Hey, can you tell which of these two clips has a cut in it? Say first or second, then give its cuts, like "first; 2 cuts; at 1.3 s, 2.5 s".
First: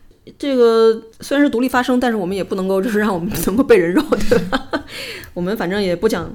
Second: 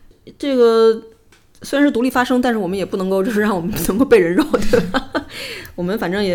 first; 1 cut; at 1.1 s